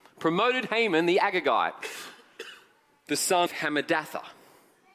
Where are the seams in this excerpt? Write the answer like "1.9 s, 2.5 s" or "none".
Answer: 3.5 s

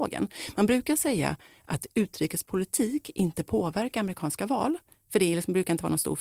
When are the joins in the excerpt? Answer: none

